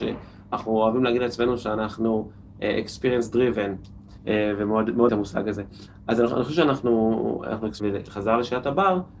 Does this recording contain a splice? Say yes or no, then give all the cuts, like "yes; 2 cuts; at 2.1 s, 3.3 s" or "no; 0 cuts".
yes; 1 cut; at 5.1 s